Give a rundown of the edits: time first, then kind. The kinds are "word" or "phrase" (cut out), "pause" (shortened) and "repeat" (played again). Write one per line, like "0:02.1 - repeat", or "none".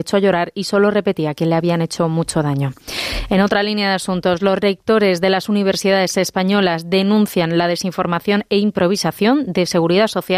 none